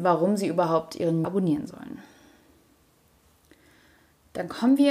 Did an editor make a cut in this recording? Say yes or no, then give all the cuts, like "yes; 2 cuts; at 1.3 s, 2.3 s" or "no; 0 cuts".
yes; 1 cut; at 1.2 s